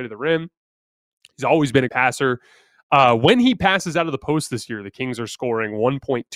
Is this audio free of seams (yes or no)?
no